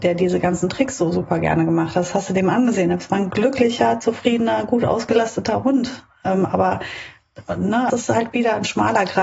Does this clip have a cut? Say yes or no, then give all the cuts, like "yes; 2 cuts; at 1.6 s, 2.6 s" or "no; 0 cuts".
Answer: yes; 1 cut; at 7.9 s